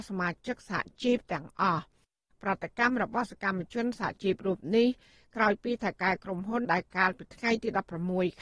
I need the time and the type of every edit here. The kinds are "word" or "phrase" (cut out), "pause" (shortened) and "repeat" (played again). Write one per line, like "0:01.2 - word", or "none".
0:06.6 - word